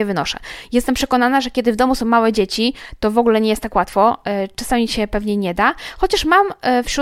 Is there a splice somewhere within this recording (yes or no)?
no